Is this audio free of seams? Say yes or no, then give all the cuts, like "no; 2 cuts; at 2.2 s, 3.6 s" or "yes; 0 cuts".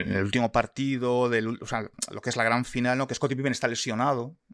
yes; 0 cuts